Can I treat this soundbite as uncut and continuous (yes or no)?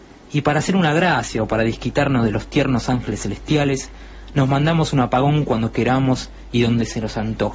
yes